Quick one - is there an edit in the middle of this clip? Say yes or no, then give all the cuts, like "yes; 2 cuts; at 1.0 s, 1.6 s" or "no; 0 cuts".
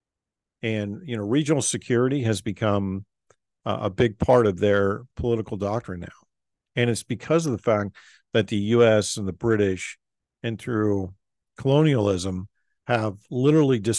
no; 0 cuts